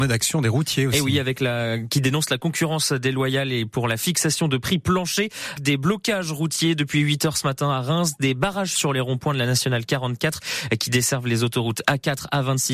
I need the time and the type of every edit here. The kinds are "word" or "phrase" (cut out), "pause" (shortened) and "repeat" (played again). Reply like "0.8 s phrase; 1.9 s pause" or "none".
5.6 s word; 8.8 s word